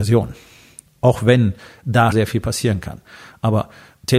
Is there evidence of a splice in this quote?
yes; 1 cut; at 2.1 s

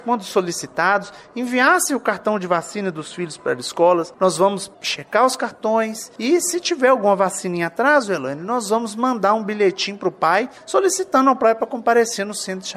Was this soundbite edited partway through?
no; 0 cuts

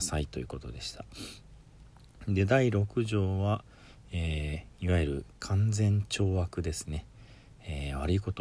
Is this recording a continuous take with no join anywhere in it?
no; 1 cut; at 5.4 s

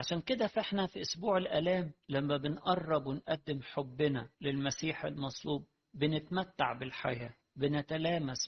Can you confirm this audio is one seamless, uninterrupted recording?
no; 3 cuts; at 2.0 s, 4.3 s, 7.4 s

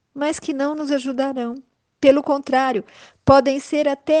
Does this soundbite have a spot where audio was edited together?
no; 0 cuts

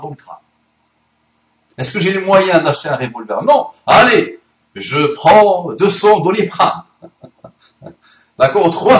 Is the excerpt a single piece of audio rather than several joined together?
yes; 0 cuts

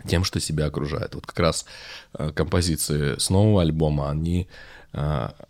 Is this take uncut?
yes; 0 cuts

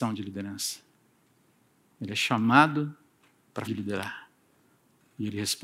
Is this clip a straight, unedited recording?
no; 1 cut; at 3.7 s

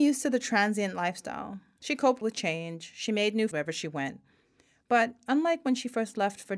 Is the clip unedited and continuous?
no; 2 cuts; at 2.2 s, 3.5 s

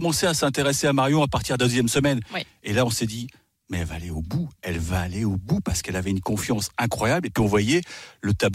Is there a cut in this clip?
no; 0 cuts

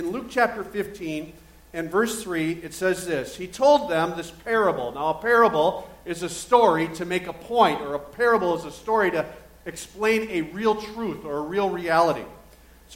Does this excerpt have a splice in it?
no; 0 cuts

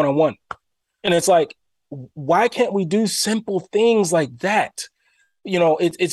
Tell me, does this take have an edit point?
no; 0 cuts

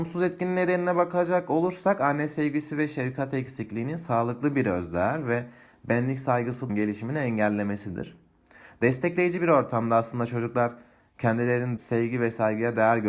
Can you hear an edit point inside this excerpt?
yes; 2 cuts; at 6.7 s, 11.8 s

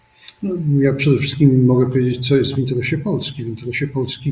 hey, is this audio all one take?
yes; 0 cuts

